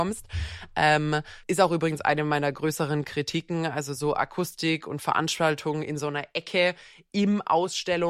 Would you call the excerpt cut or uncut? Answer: cut